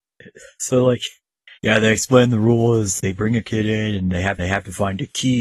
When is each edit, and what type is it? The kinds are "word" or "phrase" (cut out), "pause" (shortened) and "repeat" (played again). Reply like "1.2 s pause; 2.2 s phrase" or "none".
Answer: 1.6 s pause; 3.0 s word; 4.4 s repeat